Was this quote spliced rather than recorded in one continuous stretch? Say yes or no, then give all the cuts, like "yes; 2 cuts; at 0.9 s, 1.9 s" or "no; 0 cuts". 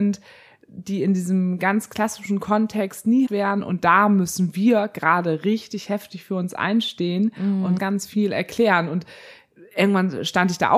yes; 2 cuts; at 3.3 s, 7.8 s